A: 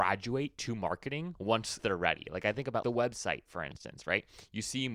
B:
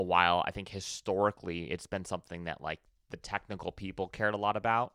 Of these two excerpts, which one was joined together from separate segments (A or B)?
A